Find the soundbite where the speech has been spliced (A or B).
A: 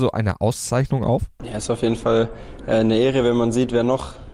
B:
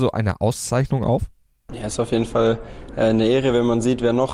A